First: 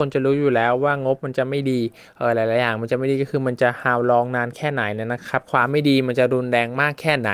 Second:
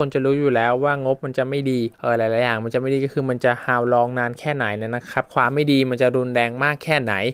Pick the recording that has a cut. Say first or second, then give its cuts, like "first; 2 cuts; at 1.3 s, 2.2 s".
second; 1 cut; at 1.9 s